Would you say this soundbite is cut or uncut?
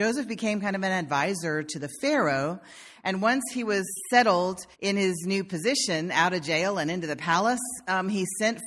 cut